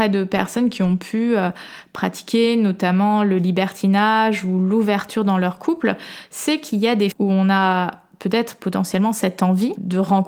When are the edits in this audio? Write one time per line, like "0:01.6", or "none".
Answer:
0:07.1